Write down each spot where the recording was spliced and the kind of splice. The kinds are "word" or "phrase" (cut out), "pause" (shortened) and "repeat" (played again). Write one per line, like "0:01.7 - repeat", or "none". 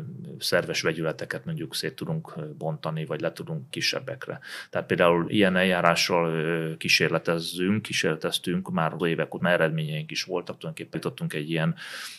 0:03.7 - word
0:05.3 - word
0:09.0 - word
0:09.4 - word
0:10.9 - word